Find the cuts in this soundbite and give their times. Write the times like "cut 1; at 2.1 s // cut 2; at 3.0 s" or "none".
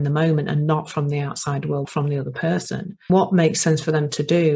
cut 1; at 1.8 s // cut 2; at 3.1 s